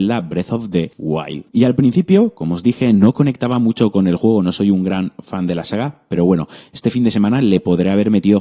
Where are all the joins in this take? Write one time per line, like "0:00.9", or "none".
none